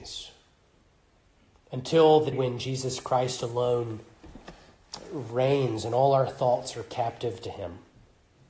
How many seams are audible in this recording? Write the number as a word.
one